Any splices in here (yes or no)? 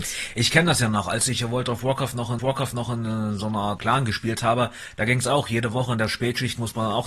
yes